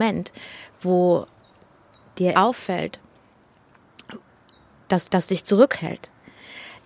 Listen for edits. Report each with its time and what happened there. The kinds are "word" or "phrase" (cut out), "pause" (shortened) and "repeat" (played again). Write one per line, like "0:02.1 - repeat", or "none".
0:02.3 - word
0:05.0 - repeat